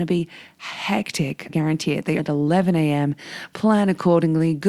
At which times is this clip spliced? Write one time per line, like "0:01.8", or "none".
0:01.5
0:02.2